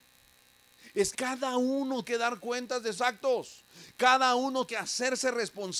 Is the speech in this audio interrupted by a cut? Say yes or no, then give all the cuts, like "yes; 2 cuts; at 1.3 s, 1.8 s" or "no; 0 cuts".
yes; 4 cuts; at 1.1 s, 2.0 s, 3.0 s, 4.7 s